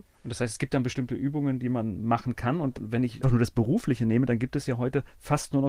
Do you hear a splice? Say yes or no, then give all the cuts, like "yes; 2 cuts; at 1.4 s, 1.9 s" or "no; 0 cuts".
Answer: yes; 1 cut; at 3.2 s